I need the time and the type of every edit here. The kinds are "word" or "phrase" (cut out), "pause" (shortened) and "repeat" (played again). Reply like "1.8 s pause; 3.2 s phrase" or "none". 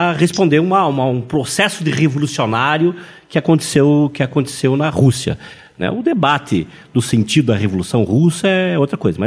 none